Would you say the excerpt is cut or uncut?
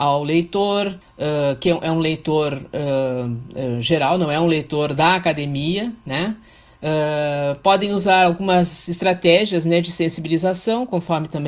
cut